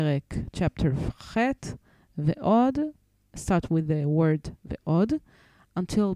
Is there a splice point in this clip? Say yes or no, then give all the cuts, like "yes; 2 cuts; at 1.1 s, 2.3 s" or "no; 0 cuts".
no; 0 cuts